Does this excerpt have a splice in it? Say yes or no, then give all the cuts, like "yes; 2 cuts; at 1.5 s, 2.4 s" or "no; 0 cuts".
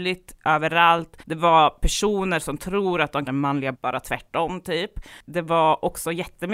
yes; 3 cuts; at 1.2 s, 3.3 s, 3.7 s